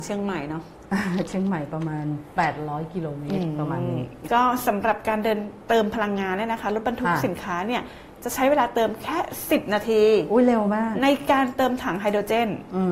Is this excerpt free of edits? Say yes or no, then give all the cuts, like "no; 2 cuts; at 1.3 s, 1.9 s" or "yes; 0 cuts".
no; 1 cut; at 4.2 s